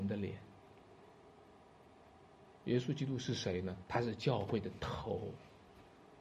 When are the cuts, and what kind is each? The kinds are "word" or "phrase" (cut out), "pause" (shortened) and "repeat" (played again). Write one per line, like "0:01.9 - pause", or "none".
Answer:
0:03.8 - pause